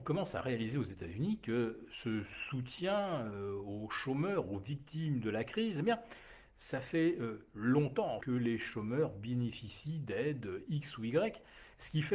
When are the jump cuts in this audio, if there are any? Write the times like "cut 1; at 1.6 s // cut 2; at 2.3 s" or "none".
cut 1; at 8.2 s

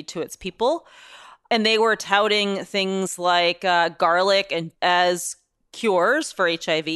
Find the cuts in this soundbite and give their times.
cut 1; at 4.7 s

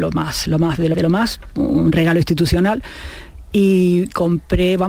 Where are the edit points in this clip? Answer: cut 1; at 0.9 s // cut 2; at 1.5 s

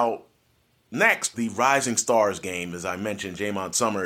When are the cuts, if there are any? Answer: cut 1; at 1.3 s

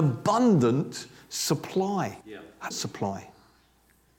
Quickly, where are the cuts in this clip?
cut 1; at 2.2 s // cut 2; at 2.7 s

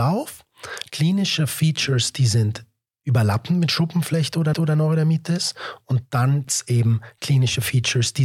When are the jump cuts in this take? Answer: cut 1; at 4.5 s // cut 2; at 6.4 s

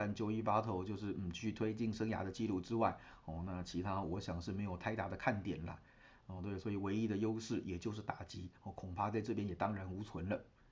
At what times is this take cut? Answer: none

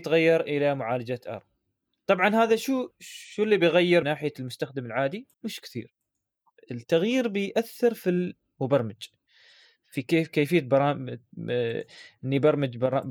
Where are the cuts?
cut 1; at 2.9 s // cut 2; at 4.0 s // cut 3; at 5.3 s

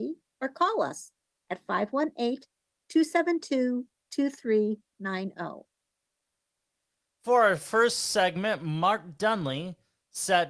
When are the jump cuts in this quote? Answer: none

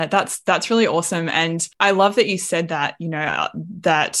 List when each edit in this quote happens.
cut 1; at 1.7 s

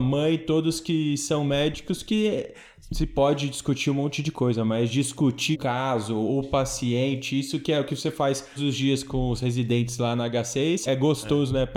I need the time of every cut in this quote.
cut 1; at 5.5 s // cut 2; at 8.6 s // cut 3; at 10.9 s

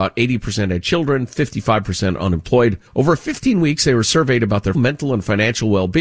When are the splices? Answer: cut 1; at 2.9 s // cut 2; at 4.7 s

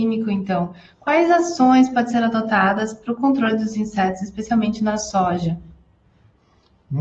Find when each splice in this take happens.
none

